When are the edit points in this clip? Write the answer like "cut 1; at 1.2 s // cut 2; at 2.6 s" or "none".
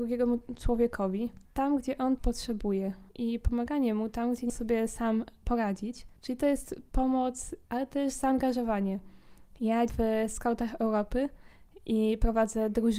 cut 1; at 1.4 s // cut 2; at 2.2 s // cut 3; at 3.1 s // cut 4; at 4.5 s // cut 5; at 9.9 s